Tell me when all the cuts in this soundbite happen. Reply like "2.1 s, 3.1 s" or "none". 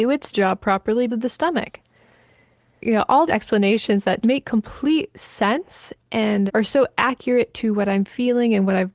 1.1 s, 2.8 s, 3.3 s, 4.2 s, 6.0 s, 6.5 s